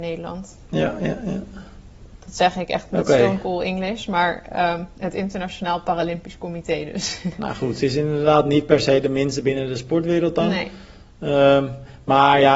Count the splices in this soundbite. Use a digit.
0